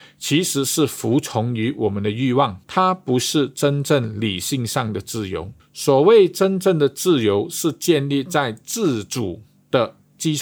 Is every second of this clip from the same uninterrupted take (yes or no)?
no